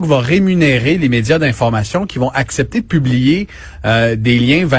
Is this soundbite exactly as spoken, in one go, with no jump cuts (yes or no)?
yes